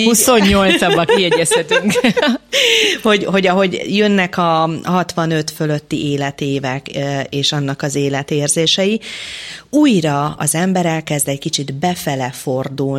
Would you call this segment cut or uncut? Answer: uncut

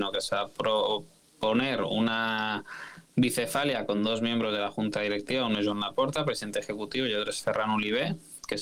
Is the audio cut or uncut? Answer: uncut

